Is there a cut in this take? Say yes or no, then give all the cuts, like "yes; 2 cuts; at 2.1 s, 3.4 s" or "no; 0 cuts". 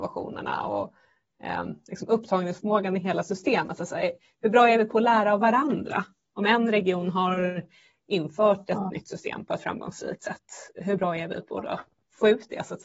no; 0 cuts